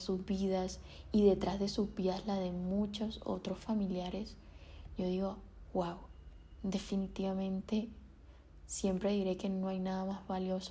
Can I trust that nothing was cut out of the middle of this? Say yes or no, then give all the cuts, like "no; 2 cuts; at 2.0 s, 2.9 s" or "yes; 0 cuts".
yes; 0 cuts